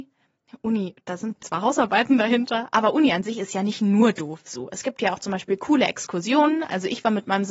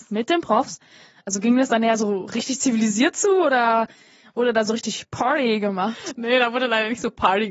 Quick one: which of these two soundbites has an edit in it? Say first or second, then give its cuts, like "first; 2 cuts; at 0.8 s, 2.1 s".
first; 1 cut; at 1.4 s